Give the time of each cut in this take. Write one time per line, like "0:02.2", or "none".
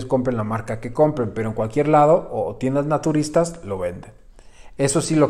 none